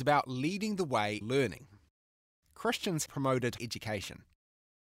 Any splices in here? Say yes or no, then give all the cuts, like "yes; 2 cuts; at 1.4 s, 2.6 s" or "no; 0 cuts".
yes; 3 cuts; at 1.2 s, 3.1 s, 3.6 s